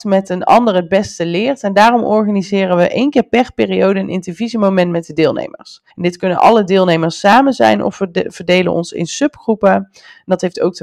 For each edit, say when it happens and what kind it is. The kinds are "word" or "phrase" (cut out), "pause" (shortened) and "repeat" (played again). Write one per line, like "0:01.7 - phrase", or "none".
0:05.9 - pause